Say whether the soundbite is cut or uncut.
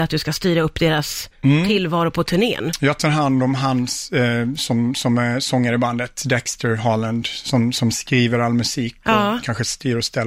uncut